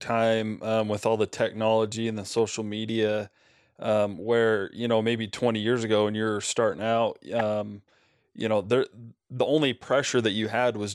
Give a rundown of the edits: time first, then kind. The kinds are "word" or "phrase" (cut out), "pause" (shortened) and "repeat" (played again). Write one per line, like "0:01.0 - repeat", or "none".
none